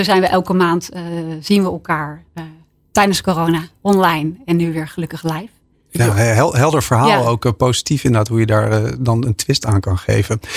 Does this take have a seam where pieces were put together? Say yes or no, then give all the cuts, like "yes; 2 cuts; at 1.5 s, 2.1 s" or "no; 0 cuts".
no; 0 cuts